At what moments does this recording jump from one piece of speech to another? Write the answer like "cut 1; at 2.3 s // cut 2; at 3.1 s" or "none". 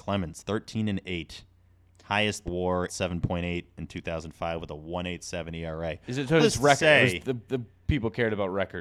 cut 1; at 2.5 s // cut 2; at 2.9 s // cut 3; at 6.4 s // cut 4; at 7.5 s